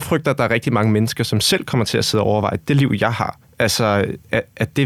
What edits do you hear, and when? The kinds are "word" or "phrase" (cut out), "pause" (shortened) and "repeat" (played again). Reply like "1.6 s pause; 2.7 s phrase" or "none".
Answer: 3.4 s pause

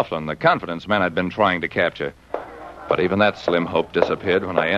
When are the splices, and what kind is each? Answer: none

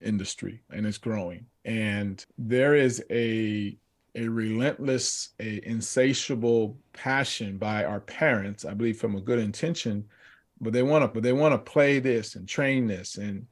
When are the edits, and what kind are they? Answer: 5.3 s pause; 11.1 s repeat

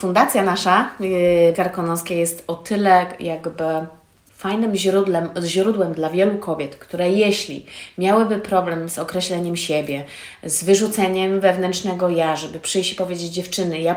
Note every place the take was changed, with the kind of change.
1.5 s word

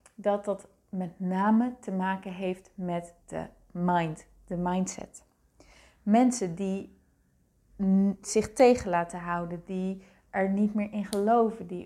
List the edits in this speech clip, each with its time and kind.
none

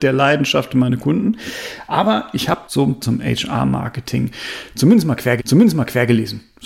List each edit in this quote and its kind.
2.7 s word; 3.0 s phrase; 5.4 s repeat

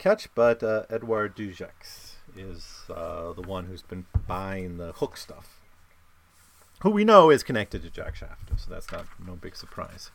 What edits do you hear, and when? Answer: none

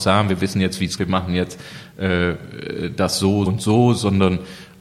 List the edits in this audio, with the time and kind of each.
1.0 s phrase; 3.5 s word

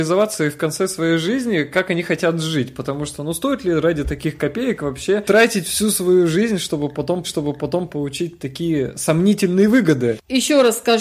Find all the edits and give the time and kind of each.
7.2 s repeat

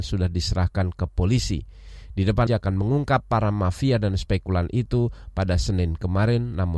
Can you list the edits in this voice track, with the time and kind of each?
2.5 s phrase

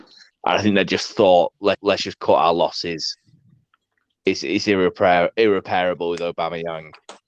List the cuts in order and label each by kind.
1.7 s repeat

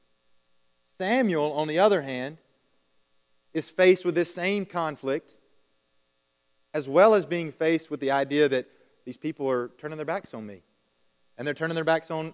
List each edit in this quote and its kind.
none

